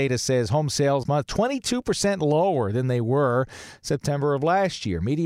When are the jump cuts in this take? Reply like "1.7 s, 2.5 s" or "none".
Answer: 1.0 s